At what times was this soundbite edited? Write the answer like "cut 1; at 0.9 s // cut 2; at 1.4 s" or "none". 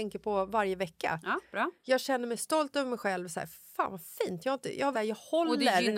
cut 1; at 4.9 s